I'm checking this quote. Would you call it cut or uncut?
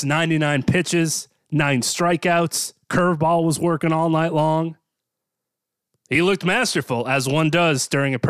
uncut